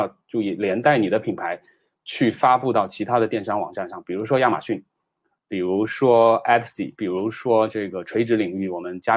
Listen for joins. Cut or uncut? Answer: uncut